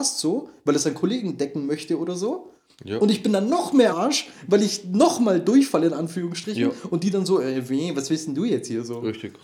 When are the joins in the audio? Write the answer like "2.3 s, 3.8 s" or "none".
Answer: 3.9 s

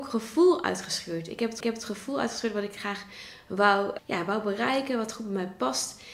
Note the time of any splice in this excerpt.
1.6 s, 4.0 s

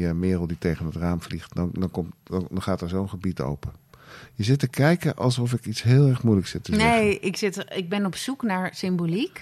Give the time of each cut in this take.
none

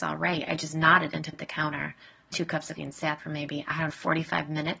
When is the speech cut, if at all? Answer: 1.3 s, 2.3 s, 2.8 s, 3.2 s, 3.9 s

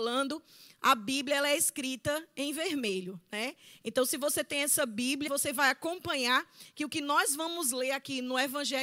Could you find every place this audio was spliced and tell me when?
5.3 s

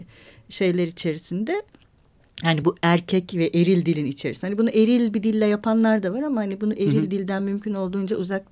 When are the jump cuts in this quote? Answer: none

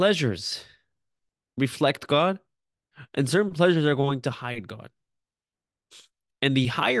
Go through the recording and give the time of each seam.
1.3 s

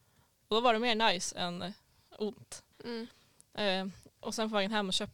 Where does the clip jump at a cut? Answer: 2.7 s

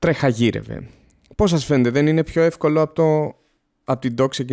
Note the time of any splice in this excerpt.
none

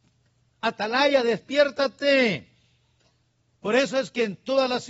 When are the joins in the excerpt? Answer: none

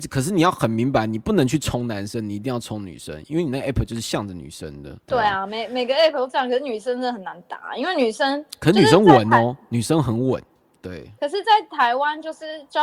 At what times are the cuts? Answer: 5.0 s, 11.2 s

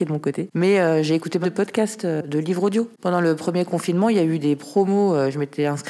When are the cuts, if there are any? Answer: 1.4 s

